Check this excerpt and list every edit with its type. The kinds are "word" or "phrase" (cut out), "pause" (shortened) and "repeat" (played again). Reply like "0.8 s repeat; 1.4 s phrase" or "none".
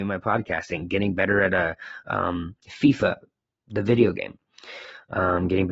none